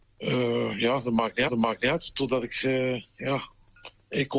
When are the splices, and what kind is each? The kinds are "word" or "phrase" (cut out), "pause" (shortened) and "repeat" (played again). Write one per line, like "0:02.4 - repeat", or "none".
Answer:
0:01.5 - repeat